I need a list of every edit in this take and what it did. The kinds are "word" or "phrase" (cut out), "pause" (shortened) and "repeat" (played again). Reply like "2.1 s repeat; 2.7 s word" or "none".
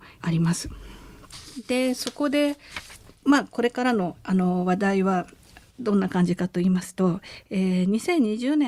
none